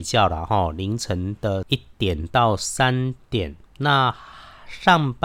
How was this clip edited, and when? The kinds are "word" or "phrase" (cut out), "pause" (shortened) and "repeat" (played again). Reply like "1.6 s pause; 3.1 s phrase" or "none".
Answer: 3.7 s pause